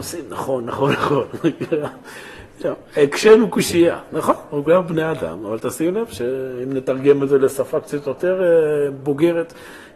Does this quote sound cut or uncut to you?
uncut